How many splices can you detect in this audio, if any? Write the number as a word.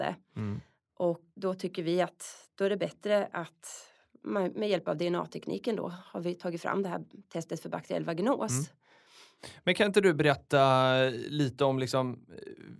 one